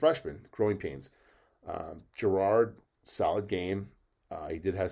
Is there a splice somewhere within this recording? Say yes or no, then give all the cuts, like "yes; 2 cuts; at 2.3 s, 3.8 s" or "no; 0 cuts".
no; 0 cuts